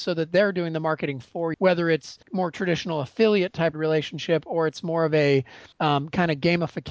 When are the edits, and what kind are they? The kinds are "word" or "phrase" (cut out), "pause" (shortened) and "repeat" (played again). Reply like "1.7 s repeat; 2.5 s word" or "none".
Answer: 1.5 s word; 2.2 s pause; 3.7 s word; 5.7 s pause